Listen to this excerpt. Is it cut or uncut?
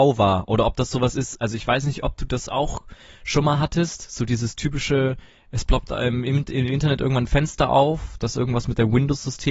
uncut